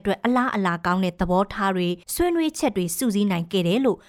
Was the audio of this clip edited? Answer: yes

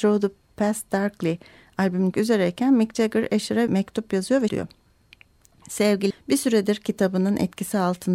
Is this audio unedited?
no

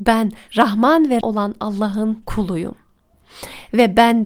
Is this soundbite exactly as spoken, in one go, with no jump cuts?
no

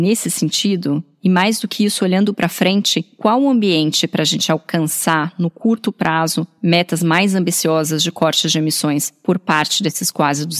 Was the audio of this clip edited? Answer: no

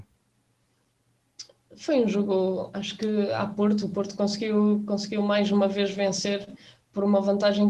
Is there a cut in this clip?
no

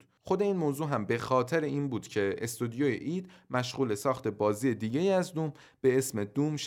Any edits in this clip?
no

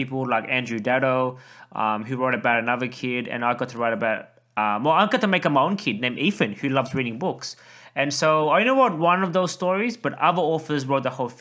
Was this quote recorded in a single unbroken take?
yes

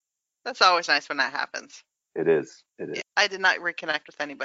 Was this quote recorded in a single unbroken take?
no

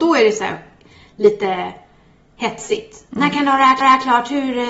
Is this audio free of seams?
no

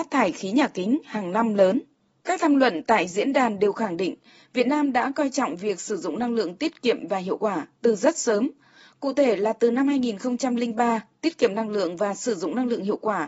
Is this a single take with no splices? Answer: yes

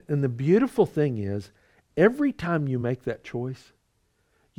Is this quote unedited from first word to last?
yes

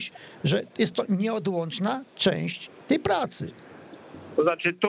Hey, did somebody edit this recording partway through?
no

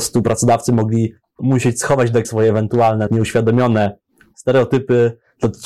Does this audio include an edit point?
yes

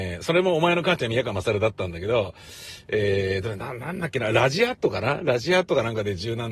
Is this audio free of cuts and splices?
yes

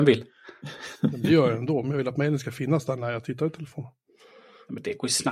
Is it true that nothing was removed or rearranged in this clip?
no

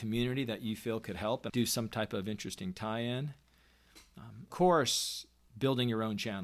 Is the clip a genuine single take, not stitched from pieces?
no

